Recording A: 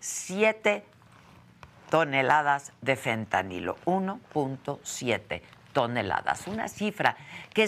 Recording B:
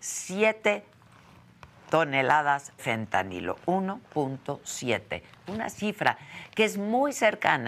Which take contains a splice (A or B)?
B